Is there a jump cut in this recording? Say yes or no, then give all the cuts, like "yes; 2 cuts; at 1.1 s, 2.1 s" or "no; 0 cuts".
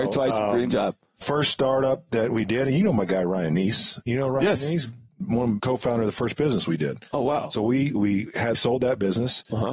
yes; 4 cuts; at 1.2 s, 5.6 s, 7.9 s, 8.5 s